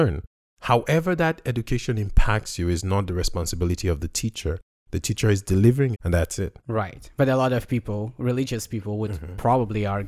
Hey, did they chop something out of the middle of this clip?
yes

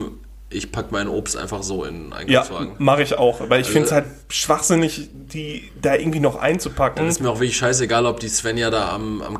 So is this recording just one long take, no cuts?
yes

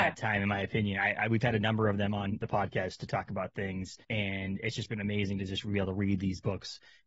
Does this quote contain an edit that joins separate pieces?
yes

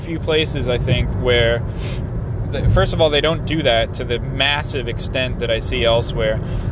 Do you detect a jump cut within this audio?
no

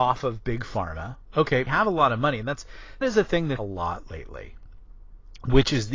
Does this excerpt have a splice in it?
yes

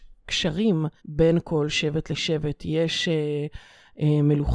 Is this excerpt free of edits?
no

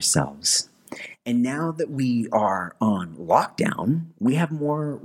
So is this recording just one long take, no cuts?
yes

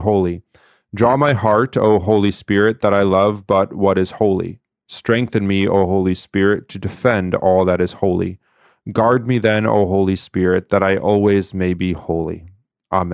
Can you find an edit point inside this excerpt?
no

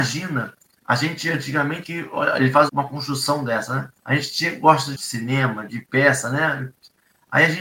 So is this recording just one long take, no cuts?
no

